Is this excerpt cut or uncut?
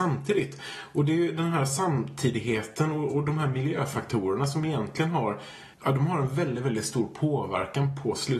cut